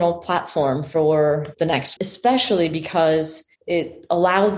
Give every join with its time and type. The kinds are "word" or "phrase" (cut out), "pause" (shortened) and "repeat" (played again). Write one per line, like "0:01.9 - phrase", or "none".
0:01.5 - word
0:02.0 - word
0:03.6 - pause